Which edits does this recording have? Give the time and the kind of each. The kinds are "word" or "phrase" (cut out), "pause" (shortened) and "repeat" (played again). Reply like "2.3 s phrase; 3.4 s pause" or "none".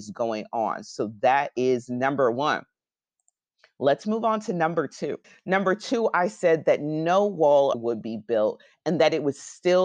5.2 s pause; 7.7 s phrase